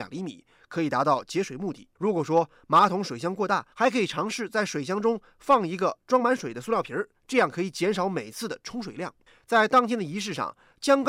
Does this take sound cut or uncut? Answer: cut